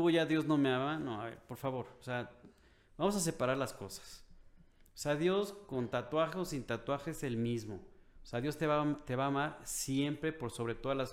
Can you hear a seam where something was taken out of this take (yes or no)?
no